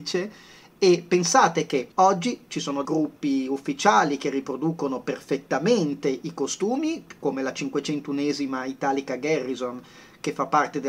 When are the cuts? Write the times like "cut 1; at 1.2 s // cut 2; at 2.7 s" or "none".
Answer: cut 1; at 1.9 s // cut 2; at 2.8 s